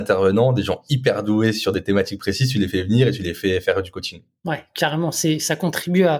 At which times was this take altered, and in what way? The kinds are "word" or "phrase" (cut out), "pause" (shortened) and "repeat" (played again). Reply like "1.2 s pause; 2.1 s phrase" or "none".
none

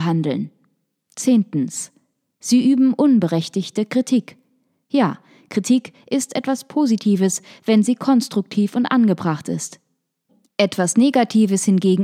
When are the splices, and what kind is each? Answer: none

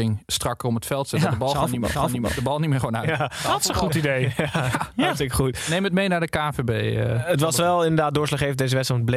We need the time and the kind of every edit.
1.9 s repeat

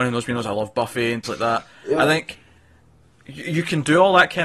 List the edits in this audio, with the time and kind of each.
1.2 s word

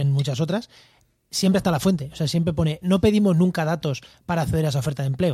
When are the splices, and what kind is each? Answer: 2.8 s phrase

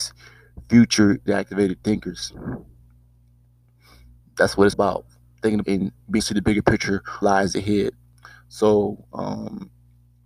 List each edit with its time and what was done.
1.3 s word; 4.7 s word; 5.6 s word; 6.2 s word; 7.2 s word

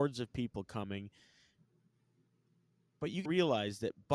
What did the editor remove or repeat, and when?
3.3 s word

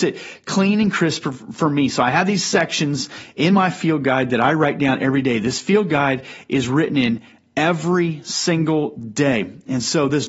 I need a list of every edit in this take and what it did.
none

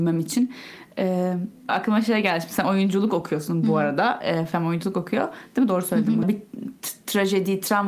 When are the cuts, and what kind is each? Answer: 1.7 s word; 6.2 s phrase

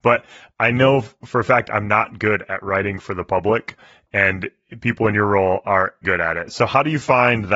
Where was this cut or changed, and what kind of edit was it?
6.0 s word

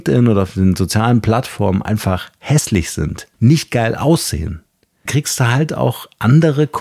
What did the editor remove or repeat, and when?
3.3 s pause; 5.1 s word

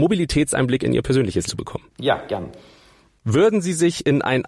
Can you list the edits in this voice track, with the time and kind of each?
1.5 s word; 1.9 s pause

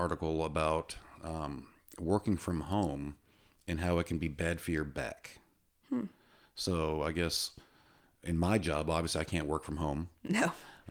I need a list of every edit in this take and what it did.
none

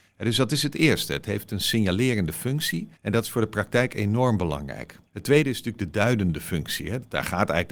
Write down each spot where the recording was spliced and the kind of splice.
3.0 s pause; 5.1 s pause

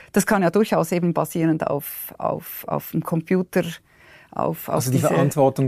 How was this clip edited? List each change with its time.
none

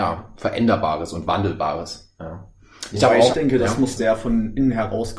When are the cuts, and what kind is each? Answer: 3.3 s word; 4.0 s word

